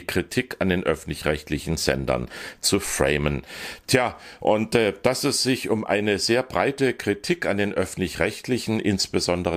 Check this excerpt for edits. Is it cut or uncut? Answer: uncut